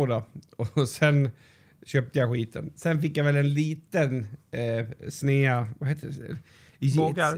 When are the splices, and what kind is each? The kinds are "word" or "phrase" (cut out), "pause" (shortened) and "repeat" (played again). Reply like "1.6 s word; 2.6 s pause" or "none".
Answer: none